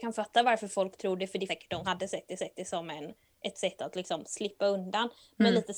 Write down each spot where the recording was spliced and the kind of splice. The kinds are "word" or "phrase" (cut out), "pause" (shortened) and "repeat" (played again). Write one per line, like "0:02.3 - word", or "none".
0:01.5 - word
0:01.8 - word
0:02.4 - repeat